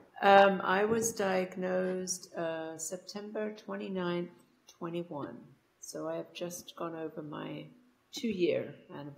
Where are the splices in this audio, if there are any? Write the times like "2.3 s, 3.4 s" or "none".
none